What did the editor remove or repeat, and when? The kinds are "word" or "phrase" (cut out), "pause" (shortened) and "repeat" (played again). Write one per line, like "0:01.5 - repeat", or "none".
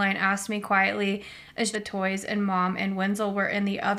0:01.7 - phrase